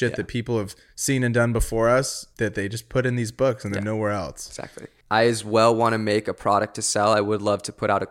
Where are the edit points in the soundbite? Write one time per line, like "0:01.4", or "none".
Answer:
0:02.3